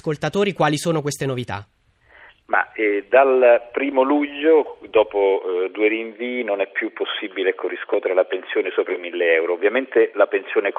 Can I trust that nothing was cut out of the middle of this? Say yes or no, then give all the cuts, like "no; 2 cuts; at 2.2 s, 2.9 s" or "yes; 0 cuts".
yes; 0 cuts